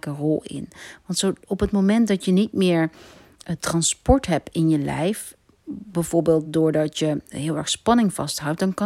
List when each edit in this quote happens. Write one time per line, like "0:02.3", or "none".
none